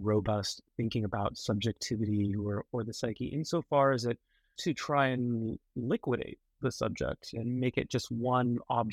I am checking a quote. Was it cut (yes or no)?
yes